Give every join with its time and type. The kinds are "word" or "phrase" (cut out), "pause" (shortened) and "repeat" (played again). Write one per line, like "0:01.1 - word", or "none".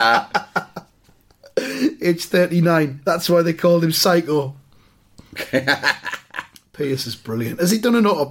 none